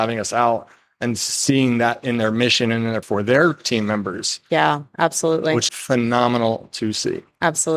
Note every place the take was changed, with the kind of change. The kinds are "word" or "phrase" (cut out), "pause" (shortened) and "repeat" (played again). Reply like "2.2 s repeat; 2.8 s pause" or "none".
3.0 s word; 5.7 s word